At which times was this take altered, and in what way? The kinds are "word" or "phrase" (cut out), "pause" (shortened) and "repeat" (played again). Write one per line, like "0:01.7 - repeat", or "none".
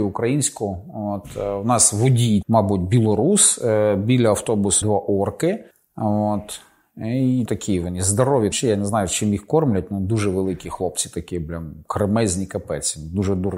0:02.4 - word
0:04.8 - word
0:05.7 - pause
0:07.5 - word
0:08.5 - word